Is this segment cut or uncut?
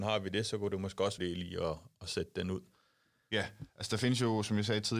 cut